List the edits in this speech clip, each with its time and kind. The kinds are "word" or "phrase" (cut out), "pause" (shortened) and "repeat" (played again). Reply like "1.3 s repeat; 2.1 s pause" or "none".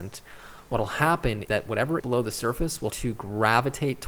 1.5 s word; 2.0 s word; 2.9 s word